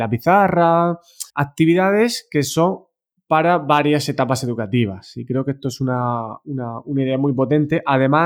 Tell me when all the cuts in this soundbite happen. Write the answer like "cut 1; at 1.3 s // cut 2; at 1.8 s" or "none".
cut 1; at 1.3 s